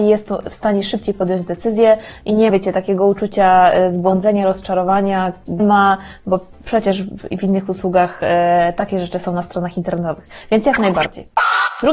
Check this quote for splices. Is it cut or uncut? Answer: cut